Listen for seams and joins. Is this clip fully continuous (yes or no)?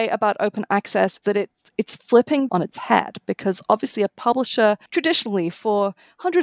no